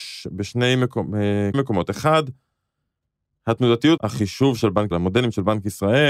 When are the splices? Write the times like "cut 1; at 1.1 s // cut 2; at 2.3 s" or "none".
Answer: cut 1; at 1.5 s // cut 2; at 4.0 s // cut 3; at 4.9 s